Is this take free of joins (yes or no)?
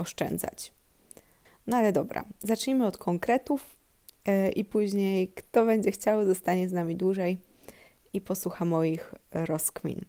yes